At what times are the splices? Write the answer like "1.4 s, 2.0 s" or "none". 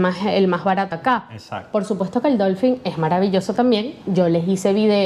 0.9 s